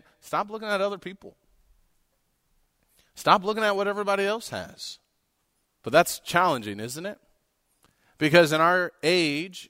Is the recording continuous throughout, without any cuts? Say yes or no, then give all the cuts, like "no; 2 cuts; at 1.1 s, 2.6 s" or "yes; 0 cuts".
yes; 0 cuts